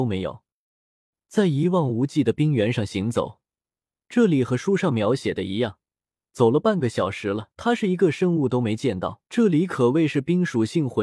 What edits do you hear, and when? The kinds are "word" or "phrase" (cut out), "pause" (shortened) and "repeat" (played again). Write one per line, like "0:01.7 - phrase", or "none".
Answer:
0:07.5 - pause
0:09.2 - pause